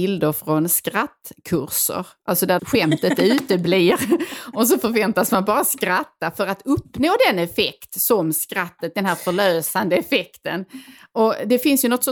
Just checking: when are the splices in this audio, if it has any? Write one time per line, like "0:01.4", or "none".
0:02.6